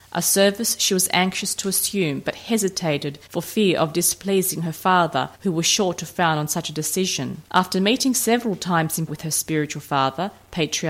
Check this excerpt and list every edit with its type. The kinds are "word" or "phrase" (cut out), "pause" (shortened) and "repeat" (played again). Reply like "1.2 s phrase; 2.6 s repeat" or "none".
3.3 s pause; 5.3 s pause; 7.5 s pause; 9.1 s word